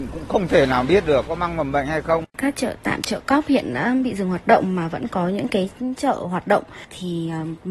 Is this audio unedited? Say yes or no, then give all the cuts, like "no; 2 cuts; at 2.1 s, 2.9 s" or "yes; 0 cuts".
no; 1 cut; at 2.3 s